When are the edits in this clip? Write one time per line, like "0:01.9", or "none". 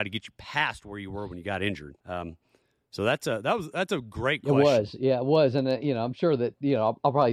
0:02.0

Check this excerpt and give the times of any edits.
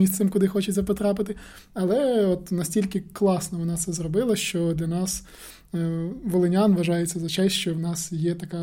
none

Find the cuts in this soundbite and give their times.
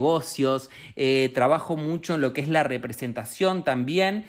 none

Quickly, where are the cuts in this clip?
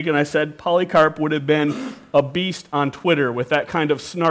none

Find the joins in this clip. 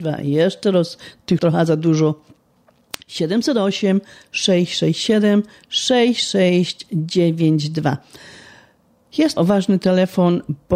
0:01.4
0:03.0
0:09.4

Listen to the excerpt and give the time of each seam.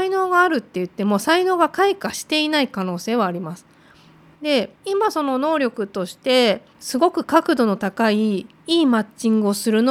0:04.8
0:06.7

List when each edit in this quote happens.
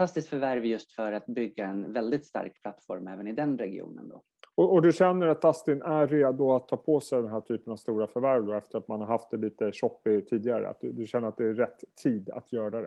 0:04.4

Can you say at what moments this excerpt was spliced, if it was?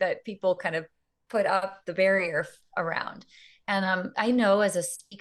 0:04.1

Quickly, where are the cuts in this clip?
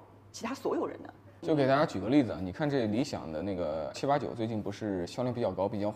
0:03.9

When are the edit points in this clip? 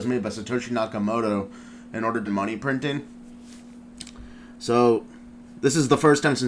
0:02.3

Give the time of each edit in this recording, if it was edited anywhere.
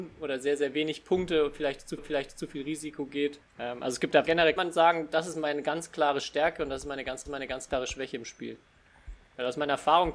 0:02.0
0:03.4
0:04.3
0:04.6
0:07.3

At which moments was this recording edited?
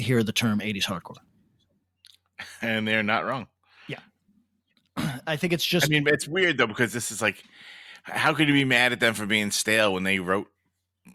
none

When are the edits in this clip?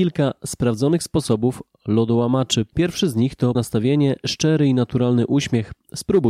0:03.6

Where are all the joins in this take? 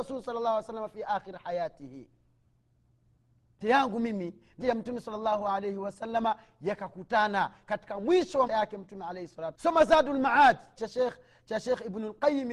0:03.6
0:04.6
0:08.5
0:09.5
0:10.8

